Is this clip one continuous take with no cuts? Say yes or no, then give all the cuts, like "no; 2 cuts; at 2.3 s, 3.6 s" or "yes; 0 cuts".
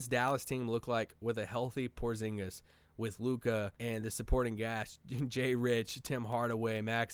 no; 1 cut; at 3.8 s